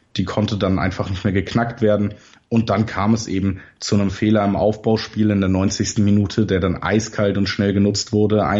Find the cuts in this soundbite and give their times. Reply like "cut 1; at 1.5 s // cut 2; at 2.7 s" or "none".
none